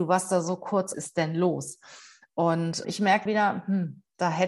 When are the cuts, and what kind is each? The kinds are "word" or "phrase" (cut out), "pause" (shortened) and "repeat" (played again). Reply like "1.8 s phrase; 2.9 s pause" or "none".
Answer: 0.9 s phrase; 2.8 s word; 3.3 s word